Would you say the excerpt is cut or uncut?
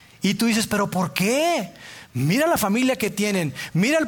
uncut